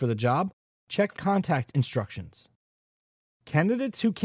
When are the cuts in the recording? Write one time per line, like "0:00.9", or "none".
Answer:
0:01.2